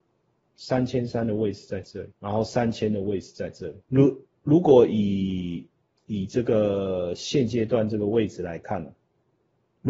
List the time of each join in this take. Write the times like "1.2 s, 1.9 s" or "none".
2.1 s, 3.8 s